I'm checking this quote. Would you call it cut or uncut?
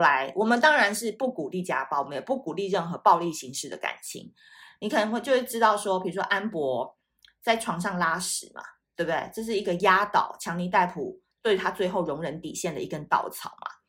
uncut